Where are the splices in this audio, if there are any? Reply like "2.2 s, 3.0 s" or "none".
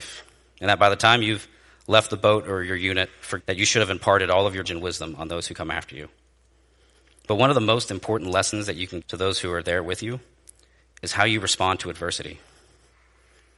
3.4 s, 4.6 s, 9.0 s